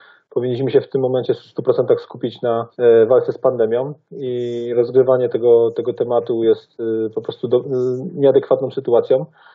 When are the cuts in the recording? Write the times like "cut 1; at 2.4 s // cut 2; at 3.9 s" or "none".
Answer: cut 1; at 2.7 s